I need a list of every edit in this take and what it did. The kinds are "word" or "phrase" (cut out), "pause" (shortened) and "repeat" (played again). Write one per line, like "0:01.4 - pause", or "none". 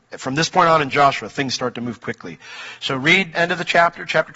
0:02.0 - word
0:03.3 - word

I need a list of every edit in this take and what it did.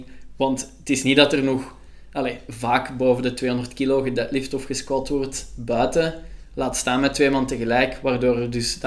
none

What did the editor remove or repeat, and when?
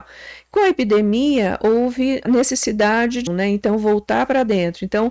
0:02.2 - word
0:03.3 - word

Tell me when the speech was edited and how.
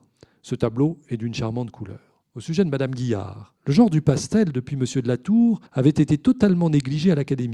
0:02.3 - pause
0:03.6 - pause
0:05.7 - pause

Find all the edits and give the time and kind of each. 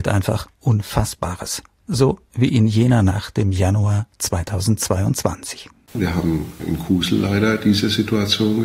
none

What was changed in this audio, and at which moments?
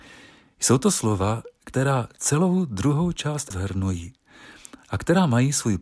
0:03.5 - word

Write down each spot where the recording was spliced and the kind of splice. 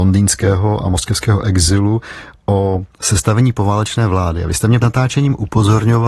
0:04.8 - word

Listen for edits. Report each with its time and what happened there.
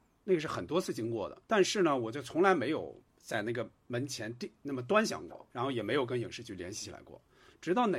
0:01.5 - pause
0:03.1 - pause
0:05.5 - pause

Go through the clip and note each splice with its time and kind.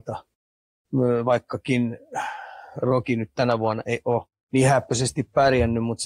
0:04.3 - pause

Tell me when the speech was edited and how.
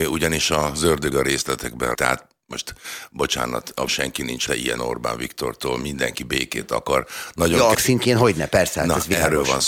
0:01.1 - word
0:01.9 - word
0:03.9 - word
0:04.5 - word
0:04.8 - word
0:07.7 - word

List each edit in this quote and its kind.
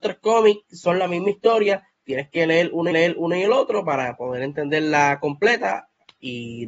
0:02.9 - repeat

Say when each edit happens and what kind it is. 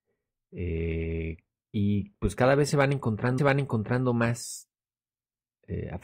0:03.4 - repeat

